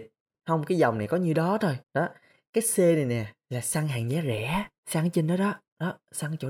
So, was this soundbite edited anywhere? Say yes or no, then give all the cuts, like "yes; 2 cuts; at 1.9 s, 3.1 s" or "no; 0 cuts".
yes; 2 cuts; at 1.8 s, 4.8 s